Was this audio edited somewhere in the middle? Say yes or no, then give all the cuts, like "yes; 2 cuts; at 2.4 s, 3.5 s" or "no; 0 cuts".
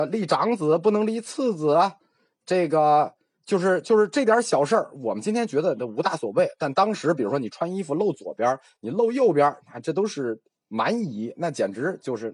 no; 0 cuts